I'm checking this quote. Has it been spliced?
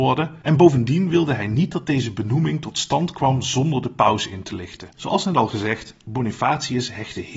yes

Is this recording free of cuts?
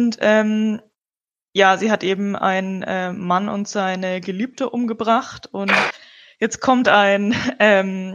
yes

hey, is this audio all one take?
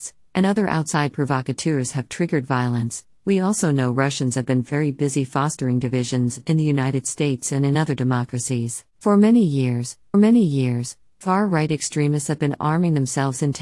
no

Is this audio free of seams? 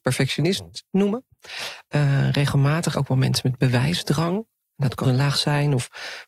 no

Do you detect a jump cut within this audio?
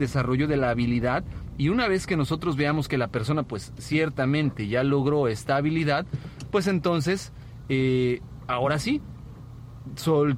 no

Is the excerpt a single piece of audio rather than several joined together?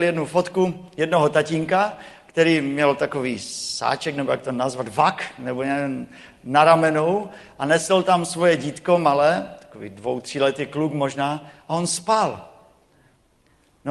yes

